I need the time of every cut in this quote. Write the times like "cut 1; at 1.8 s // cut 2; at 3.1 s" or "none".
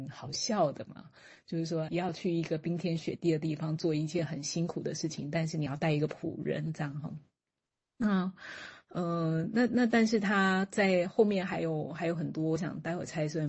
cut 1; at 1.9 s